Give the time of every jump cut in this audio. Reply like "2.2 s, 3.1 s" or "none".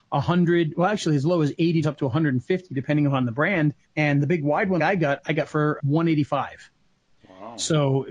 1.8 s, 3.8 s, 4.8 s, 5.8 s